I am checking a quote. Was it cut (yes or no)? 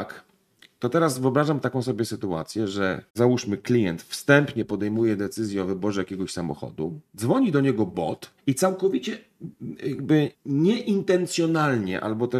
yes